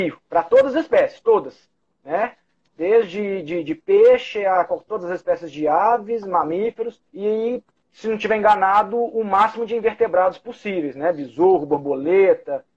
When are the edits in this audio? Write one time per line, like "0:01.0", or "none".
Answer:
0:07.1